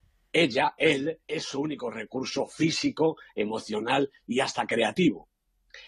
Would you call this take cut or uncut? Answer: cut